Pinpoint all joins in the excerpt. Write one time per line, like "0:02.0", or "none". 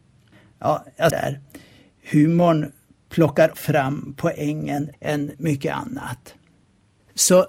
0:01.1
0:03.5
0:04.9
0:05.3